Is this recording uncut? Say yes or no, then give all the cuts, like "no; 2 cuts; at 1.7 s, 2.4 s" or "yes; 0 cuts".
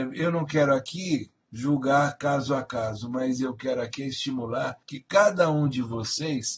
no; 1 cut; at 4.8 s